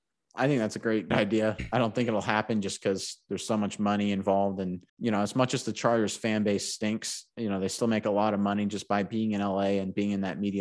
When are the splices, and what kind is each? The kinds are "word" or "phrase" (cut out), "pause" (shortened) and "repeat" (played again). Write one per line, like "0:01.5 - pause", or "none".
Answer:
0:01.1 - word
0:04.9 - pause

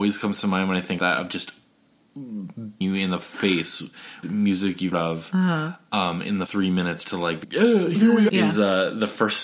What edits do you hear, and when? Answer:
0:01.0 - word
0:02.8 - word
0:04.2 - word
0:04.9 - word
0:06.5 - word
0:07.0 - word
0:07.4 - word
0:08.3 - word

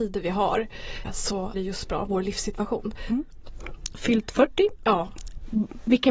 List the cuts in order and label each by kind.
0:01.0 - word
0:01.5 - phrase
0:03.9 - phrase

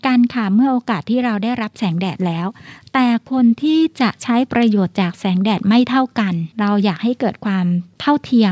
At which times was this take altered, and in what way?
0:06.5 - pause

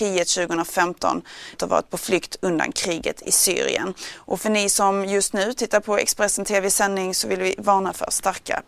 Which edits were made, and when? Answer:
0:01.5 - word

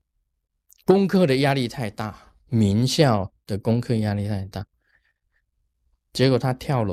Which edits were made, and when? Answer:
0:02.4 - pause

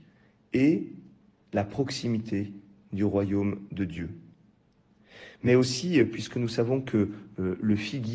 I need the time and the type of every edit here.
none

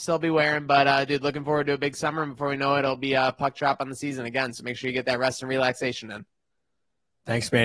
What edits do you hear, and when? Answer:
none

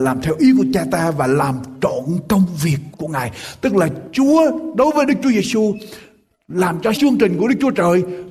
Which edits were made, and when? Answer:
0:02.9 - word
0:06.9 - word

